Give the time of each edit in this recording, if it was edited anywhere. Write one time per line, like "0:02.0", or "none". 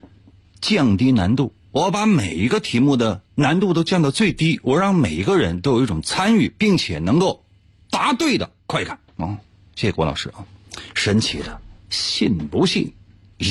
0:03.3
0:08.6
0:09.1

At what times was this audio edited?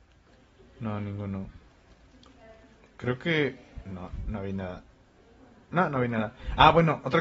none

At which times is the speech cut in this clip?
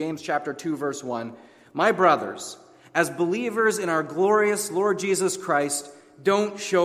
none

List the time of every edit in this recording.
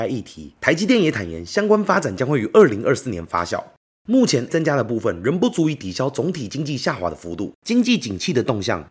0:04.5

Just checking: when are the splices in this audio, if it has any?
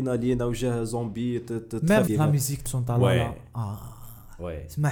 0:02.1
0:02.7

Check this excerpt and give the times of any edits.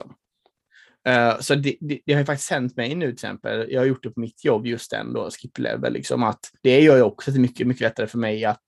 0:06.6

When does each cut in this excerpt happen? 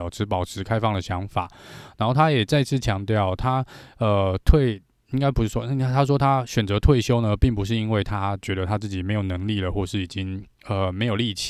none

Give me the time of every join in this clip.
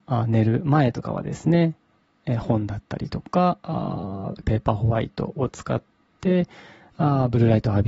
0:04.4

